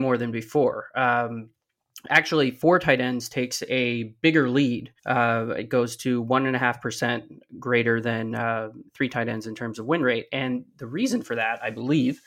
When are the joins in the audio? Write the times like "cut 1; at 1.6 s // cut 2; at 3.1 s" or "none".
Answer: cut 1; at 5.0 s // cut 2; at 8.9 s